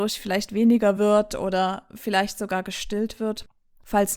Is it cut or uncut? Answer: uncut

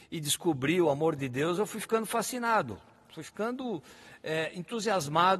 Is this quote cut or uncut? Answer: uncut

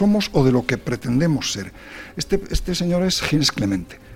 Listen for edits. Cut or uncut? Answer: uncut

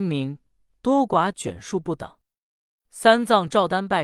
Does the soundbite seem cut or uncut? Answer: uncut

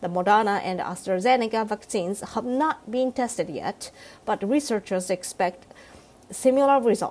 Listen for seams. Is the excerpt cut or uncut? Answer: uncut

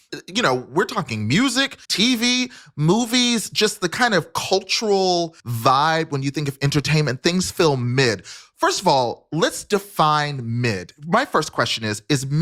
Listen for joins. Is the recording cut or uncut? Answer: cut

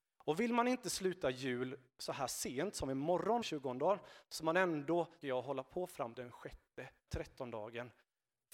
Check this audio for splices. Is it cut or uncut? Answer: cut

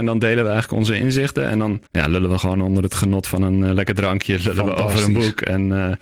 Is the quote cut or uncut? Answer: cut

